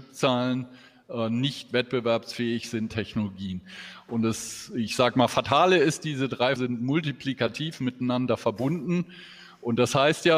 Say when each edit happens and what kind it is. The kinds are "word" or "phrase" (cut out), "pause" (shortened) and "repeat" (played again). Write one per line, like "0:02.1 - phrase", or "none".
0:02.9 - phrase
0:06.6 - word